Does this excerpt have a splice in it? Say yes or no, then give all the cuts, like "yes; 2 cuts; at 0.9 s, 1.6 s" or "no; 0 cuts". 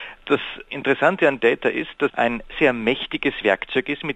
yes; 3 cuts; at 1.4 s, 2.1 s, 2.5 s